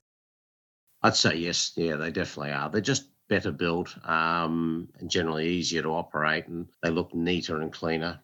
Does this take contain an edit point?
yes; 1 cut; at 6.7 s

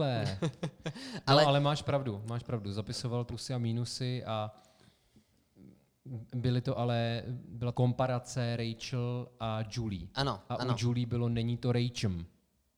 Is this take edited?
yes; 2 cuts; at 3.3 s, 7.7 s

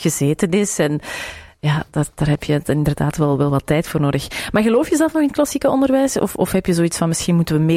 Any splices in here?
no; 0 cuts

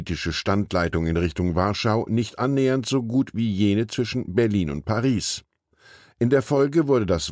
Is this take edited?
no; 0 cuts

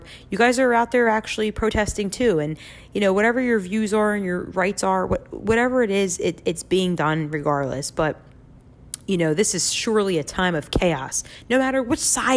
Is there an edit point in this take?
no; 0 cuts

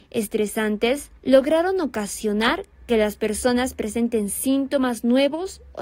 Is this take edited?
yes; 1 cut; at 1.2 s

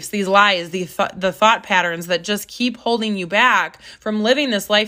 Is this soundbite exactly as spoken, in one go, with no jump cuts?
yes; 0 cuts

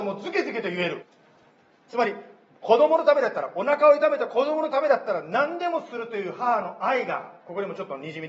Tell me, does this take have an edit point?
no; 0 cuts

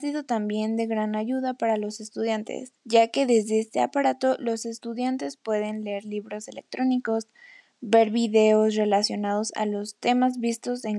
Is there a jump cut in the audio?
yes; 1 cut; at 2.8 s

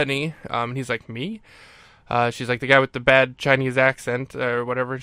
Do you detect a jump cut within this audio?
no; 0 cuts

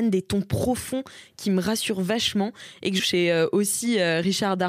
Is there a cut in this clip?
yes; 1 cut; at 3.0 s

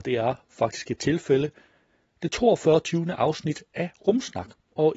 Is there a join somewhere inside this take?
no; 0 cuts

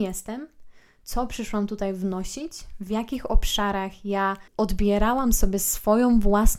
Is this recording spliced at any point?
yes; 1 cut; at 4.5 s

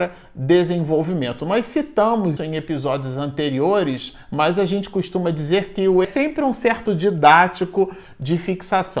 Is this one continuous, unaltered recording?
no; 3 cuts; at 2.4 s, 6.0 s, 6.9 s

